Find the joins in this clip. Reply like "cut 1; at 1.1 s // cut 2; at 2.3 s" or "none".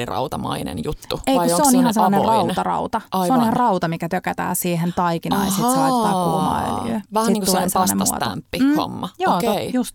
cut 1; at 7.1 s